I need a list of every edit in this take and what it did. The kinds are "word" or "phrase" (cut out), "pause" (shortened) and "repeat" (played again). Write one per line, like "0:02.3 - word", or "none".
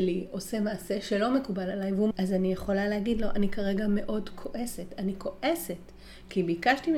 0:02.1 - phrase